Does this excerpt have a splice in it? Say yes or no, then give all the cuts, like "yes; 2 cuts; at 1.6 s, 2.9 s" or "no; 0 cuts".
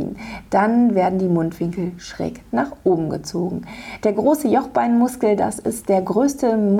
no; 0 cuts